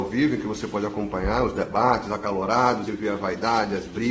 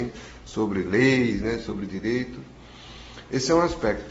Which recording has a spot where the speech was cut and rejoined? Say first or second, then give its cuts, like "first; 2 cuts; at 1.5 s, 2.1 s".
first; 1 cut; at 2.9 s